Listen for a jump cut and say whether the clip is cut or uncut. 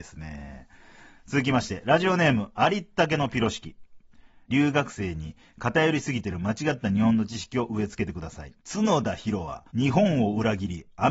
cut